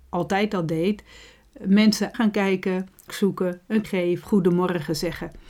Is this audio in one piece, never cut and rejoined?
no; 4 cuts; at 2.1 s, 3.1 s, 3.8 s, 4.2 s

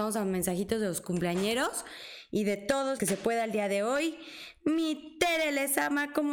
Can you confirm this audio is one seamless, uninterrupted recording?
no; 1 cut; at 3.0 s

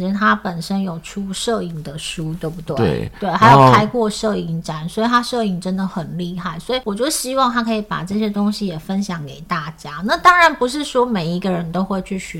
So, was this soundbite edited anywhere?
no; 0 cuts

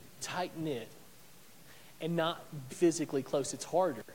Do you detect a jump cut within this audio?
yes; 1 cut; at 2.7 s

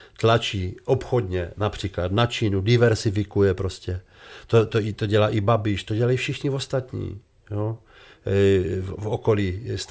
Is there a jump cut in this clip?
no; 0 cuts

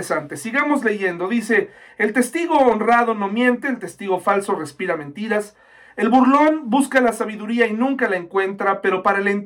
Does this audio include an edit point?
no; 0 cuts

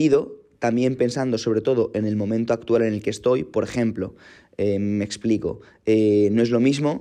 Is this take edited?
no; 0 cuts

